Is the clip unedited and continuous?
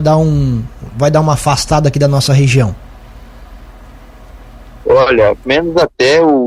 no; 1 cut; at 5.5 s

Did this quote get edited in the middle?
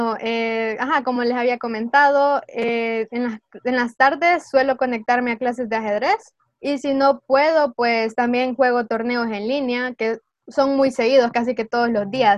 no; 0 cuts

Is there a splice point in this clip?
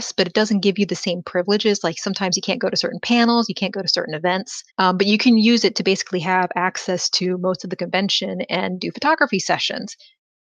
yes; 1 cut; at 4.7 s

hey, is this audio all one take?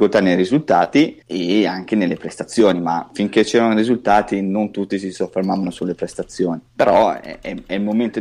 no; 2 cuts; at 1.2 s, 6.7 s

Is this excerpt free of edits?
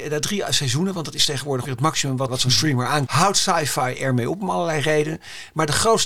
no; 3 cuts; at 1.7 s, 2.3 s, 3.1 s

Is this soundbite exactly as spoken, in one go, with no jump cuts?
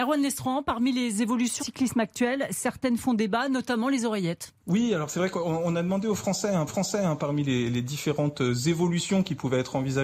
no; 3 cuts; at 1.6 s, 4.6 s, 6.7 s

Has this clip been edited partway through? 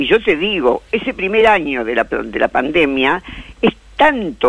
no; 0 cuts

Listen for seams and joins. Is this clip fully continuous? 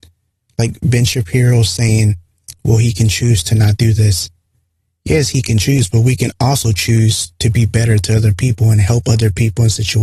yes; 0 cuts

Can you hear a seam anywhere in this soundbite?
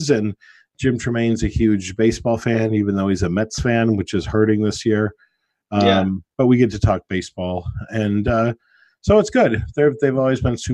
no; 0 cuts

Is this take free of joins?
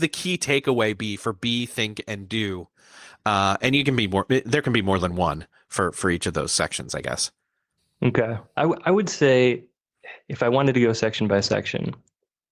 yes; 0 cuts

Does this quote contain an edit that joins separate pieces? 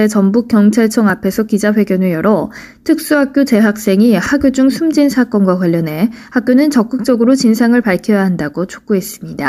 no; 0 cuts

